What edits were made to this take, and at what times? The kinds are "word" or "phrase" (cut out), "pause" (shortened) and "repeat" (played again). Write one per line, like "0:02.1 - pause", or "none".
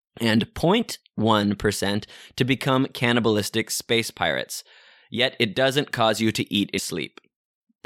0:06.8 - word